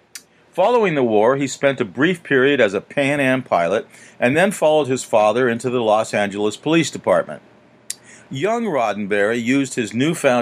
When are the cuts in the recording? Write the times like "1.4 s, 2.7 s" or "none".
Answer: none